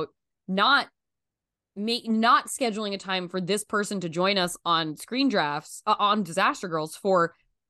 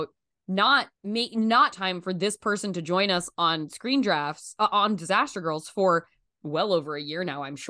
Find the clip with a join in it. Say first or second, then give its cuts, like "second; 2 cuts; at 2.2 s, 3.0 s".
second; 2 cuts; at 1.0 s, 1.7 s